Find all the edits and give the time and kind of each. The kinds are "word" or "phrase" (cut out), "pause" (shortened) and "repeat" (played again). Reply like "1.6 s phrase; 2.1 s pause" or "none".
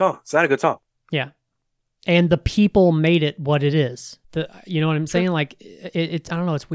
4.2 s pause